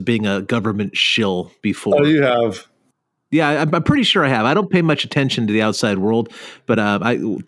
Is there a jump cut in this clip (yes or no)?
no